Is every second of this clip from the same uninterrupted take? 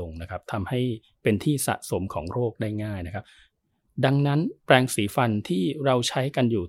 yes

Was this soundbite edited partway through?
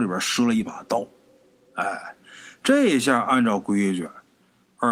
no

